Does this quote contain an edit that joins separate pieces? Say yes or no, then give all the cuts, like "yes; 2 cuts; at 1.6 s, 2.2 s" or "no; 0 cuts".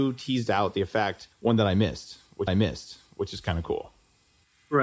yes; 2 cuts; at 1.3 s, 2.5 s